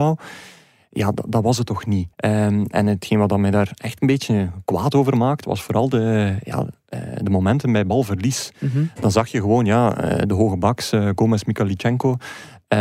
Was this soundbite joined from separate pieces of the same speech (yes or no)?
yes